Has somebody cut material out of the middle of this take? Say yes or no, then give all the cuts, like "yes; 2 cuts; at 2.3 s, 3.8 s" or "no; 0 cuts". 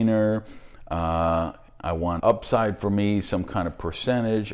yes; 1 cut; at 2.2 s